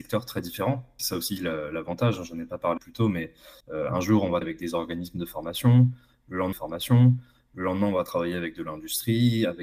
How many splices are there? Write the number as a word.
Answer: five